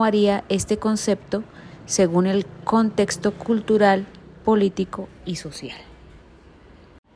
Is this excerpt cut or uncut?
uncut